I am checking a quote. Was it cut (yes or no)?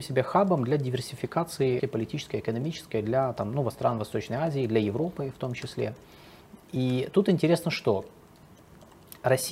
yes